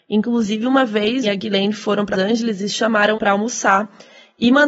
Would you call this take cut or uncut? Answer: cut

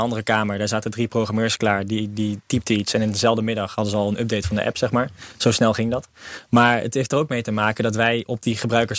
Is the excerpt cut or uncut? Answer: uncut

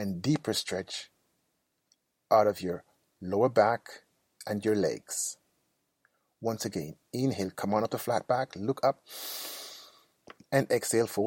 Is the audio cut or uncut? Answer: uncut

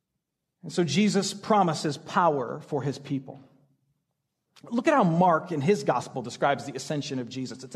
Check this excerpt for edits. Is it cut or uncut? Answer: uncut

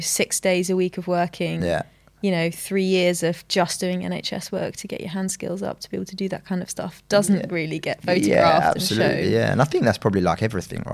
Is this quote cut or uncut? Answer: uncut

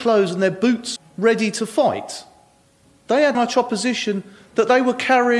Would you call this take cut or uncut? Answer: cut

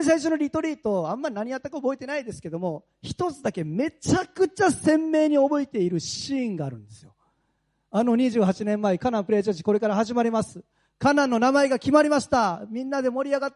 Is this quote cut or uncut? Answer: uncut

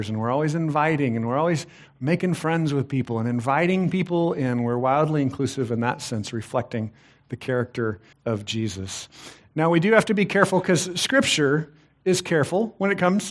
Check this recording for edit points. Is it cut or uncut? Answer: cut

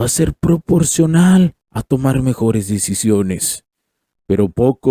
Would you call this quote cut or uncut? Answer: uncut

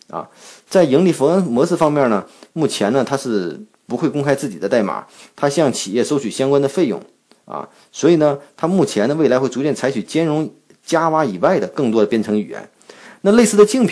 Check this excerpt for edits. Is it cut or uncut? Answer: uncut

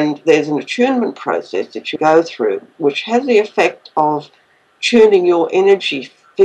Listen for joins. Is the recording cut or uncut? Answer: cut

